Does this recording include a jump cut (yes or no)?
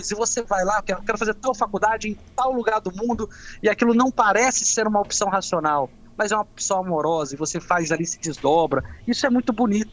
no